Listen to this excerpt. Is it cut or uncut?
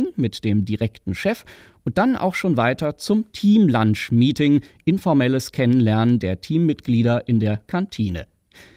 uncut